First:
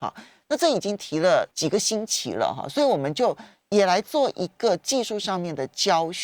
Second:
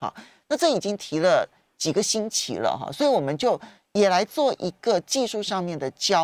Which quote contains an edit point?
first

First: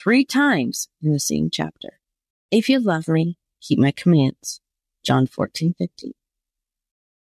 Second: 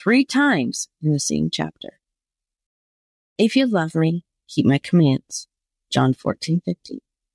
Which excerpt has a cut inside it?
first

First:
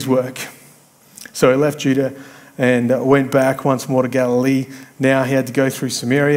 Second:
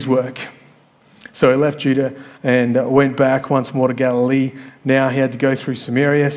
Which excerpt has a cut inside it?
second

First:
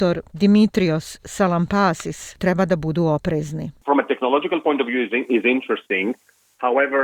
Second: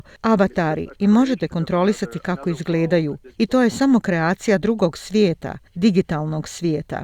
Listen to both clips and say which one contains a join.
first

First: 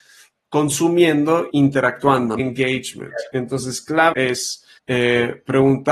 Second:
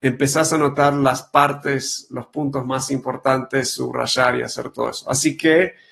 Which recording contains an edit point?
first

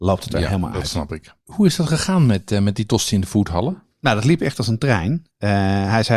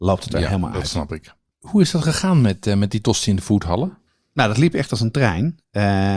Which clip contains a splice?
first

